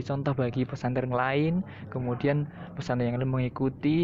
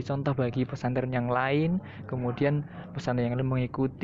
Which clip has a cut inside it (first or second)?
first